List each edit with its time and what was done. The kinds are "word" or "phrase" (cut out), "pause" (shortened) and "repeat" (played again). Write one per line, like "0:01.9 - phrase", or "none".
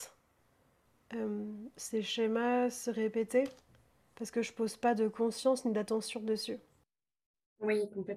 none